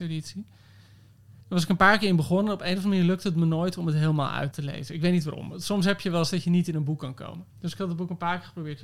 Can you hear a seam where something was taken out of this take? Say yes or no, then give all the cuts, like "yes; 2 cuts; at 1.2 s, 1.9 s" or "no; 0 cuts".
yes; 3 cuts; at 1.4 s, 4.5 s, 7.5 s